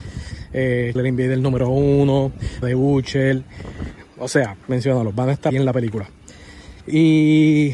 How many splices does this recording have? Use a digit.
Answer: 5